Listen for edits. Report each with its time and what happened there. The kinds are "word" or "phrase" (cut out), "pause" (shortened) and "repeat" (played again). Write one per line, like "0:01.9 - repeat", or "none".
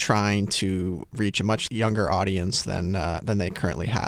none